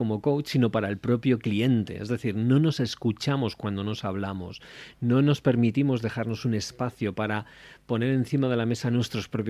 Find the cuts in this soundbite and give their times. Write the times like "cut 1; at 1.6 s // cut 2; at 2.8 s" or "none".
none